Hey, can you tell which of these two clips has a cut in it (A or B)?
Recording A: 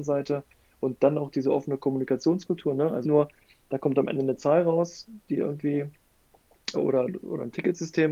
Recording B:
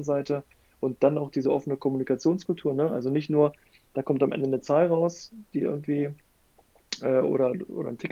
A